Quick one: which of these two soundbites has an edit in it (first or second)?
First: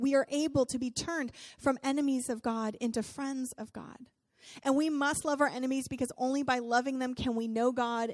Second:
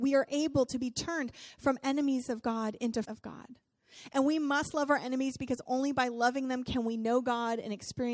second